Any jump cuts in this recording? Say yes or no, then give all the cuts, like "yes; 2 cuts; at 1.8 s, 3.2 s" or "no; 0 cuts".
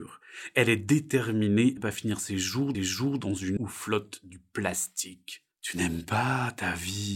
yes; 4 cuts; at 1.8 s, 2.7 s, 3.6 s, 5.5 s